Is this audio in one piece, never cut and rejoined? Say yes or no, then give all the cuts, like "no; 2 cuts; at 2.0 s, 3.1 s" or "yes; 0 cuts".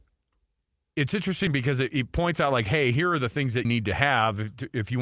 no; 1 cut; at 3.6 s